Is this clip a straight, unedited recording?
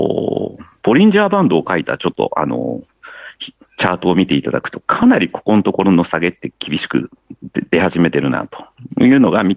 yes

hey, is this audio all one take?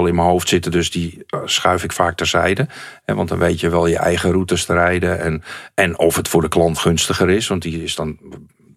no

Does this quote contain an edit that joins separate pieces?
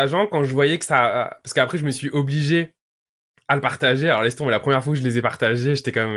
no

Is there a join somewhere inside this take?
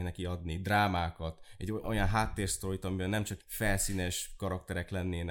yes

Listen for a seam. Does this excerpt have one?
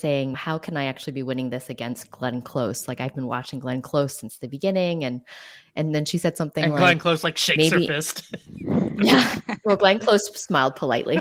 no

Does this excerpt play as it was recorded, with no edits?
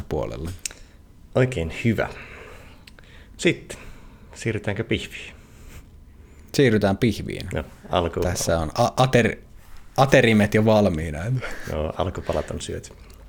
yes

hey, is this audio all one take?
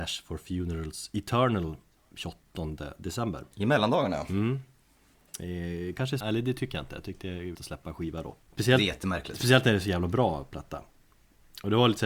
no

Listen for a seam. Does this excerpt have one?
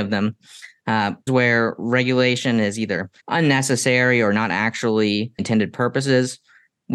yes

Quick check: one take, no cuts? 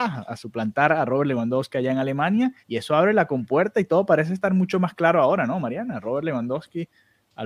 no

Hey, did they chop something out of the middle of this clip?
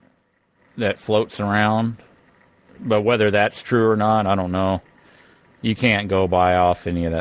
no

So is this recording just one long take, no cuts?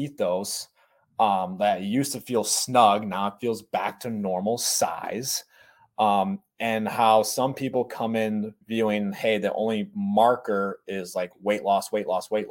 no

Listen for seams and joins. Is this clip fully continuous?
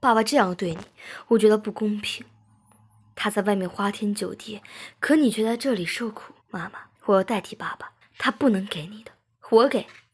no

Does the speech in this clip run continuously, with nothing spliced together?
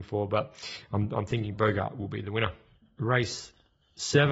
yes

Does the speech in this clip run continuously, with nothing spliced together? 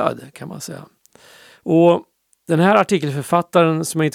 yes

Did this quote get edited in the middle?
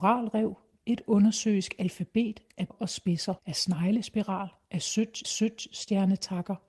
yes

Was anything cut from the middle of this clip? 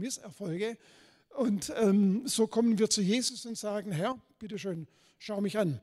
no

